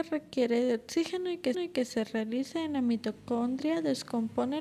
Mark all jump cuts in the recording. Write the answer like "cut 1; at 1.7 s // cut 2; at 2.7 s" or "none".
cut 1; at 1.5 s